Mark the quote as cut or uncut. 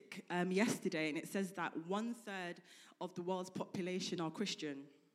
uncut